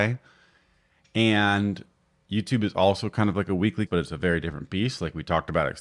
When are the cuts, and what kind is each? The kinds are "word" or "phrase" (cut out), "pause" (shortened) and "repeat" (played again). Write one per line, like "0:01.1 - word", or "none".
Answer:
0:03.9 - word